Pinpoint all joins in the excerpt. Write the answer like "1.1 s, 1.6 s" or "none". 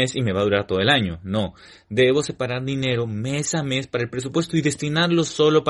none